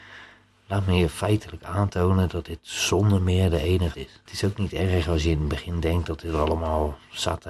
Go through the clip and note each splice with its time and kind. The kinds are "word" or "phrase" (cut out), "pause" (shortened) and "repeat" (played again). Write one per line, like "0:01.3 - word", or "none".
0:03.9 - word
0:04.3 - pause